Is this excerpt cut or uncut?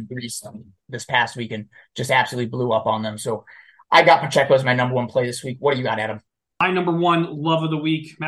uncut